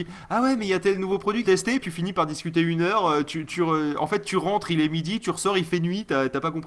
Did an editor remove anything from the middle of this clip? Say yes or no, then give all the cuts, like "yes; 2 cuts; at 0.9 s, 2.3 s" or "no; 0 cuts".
yes; 2 cuts; at 1.4 s, 1.8 s